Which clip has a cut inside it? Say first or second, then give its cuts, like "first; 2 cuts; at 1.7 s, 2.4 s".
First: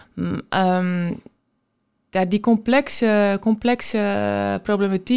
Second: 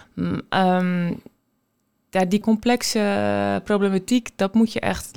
second; 1 cut; at 2.4 s